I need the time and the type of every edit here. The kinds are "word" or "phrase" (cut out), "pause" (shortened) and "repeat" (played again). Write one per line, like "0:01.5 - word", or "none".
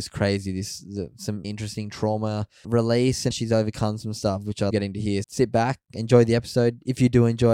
0:01.4 - word
0:02.6 - word
0:03.3 - word
0:04.7 - word
0:05.2 - word